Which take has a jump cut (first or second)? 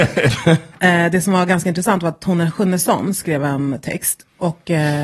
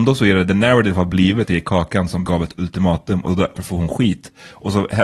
second